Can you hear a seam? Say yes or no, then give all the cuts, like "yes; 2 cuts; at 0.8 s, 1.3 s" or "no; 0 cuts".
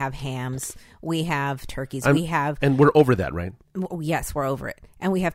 no; 0 cuts